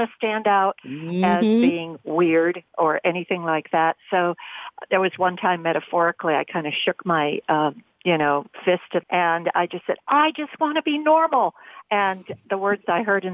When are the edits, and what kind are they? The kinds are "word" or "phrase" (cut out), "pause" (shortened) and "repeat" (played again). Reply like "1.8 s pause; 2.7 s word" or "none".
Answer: 9.0 s word